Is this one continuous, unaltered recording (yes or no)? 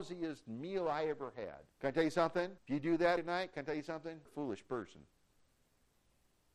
no